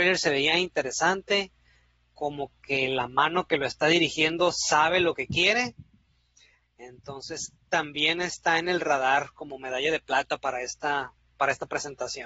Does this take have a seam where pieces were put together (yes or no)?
no